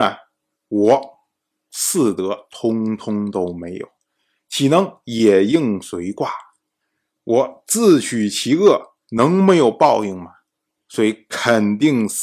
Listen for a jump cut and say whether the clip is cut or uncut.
uncut